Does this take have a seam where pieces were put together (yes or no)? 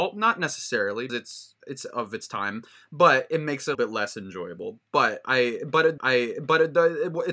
yes